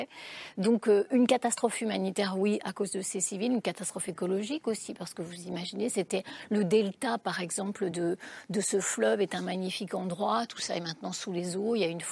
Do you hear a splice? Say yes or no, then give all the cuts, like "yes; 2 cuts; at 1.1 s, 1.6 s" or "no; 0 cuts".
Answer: no; 0 cuts